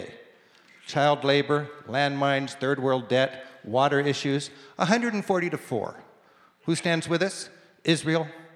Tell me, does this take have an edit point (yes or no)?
no